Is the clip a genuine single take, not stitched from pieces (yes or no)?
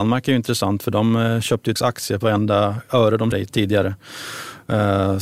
no